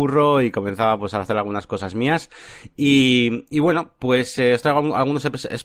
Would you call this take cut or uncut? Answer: uncut